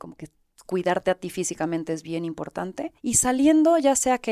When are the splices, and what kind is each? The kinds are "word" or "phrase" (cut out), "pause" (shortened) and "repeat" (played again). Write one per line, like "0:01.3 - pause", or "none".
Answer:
0:03.0 - pause